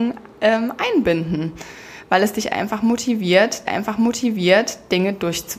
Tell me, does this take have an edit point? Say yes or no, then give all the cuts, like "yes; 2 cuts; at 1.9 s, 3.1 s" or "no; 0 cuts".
yes; 1 cut; at 3.7 s